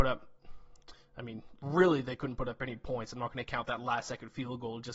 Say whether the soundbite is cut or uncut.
uncut